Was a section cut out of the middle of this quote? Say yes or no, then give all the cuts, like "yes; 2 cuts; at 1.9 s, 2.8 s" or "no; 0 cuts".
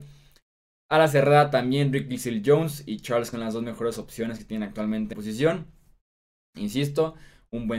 yes; 2 cuts; at 3.3 s, 5.1 s